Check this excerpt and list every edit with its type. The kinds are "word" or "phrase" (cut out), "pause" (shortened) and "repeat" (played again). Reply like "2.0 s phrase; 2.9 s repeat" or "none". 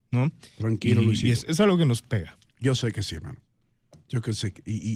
none